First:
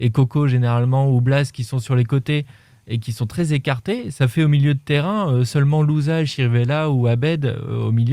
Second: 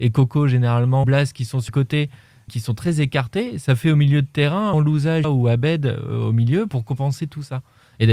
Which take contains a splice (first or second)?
second